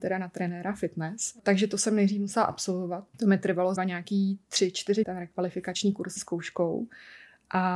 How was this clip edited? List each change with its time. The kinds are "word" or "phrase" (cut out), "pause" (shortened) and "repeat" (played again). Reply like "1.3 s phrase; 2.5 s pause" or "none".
3.8 s word; 5.0 s word; 6.2 s word